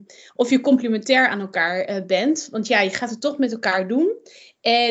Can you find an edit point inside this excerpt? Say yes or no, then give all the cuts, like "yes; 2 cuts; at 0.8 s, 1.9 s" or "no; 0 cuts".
no; 0 cuts